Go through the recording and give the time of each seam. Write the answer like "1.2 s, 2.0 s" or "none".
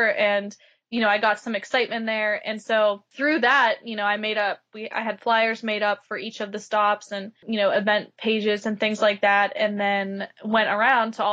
none

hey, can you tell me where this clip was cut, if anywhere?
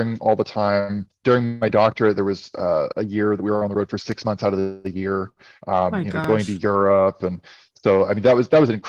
1.2 s

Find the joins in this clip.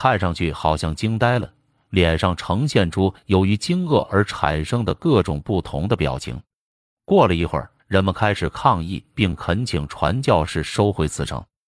7.8 s

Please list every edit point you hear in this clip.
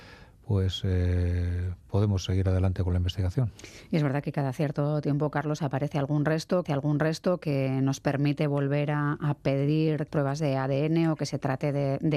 6.6 s, 10.1 s

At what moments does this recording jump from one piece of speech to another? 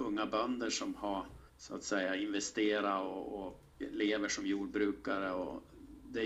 1.5 s

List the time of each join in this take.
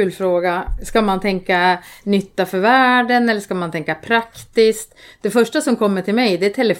none

